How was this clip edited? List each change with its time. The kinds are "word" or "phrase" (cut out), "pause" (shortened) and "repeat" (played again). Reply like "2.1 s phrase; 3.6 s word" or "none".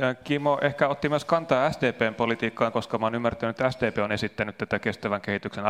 2.7 s word